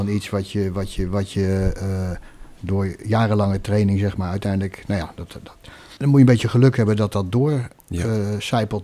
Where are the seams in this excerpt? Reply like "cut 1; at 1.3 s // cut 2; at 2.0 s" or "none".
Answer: cut 1; at 6.0 s

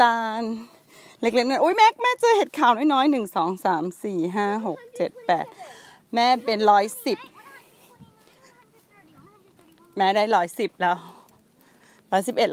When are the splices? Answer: none

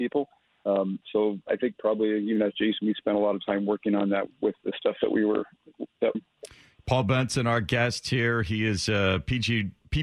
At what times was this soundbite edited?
cut 1; at 4.3 s // cut 2; at 6.1 s

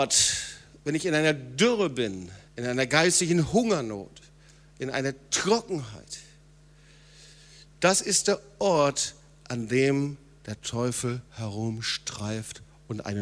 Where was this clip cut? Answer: cut 1; at 2.4 s // cut 2; at 11.3 s

